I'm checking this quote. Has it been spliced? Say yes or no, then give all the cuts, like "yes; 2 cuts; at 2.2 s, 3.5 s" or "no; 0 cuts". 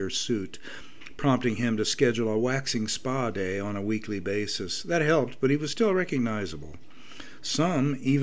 no; 0 cuts